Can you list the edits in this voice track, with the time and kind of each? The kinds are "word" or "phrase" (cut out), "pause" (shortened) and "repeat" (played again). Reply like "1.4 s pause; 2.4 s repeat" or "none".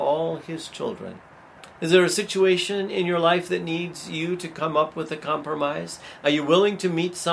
1.7 s pause

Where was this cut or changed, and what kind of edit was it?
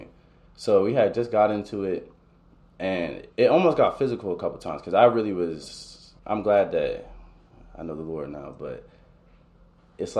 3.3 s pause; 6.2 s pause

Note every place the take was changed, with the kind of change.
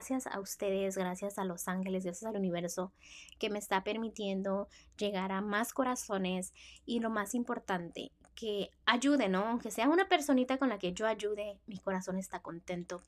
none

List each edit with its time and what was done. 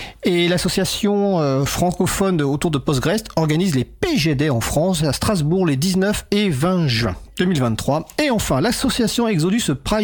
none

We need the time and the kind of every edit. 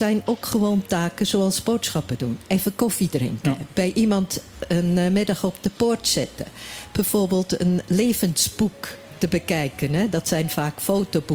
none

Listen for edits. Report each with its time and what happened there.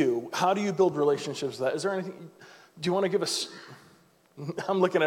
none

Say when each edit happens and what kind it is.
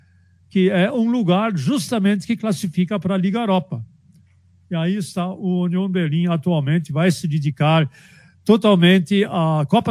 none

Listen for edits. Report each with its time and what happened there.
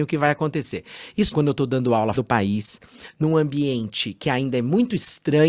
1.3 s word; 2.1 s word

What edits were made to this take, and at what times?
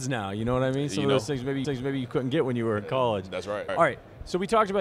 1.6 s repeat; 3.7 s word

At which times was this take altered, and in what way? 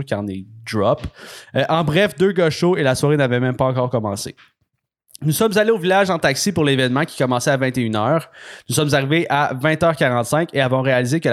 none

